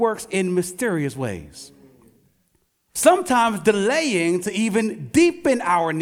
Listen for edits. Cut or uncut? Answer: uncut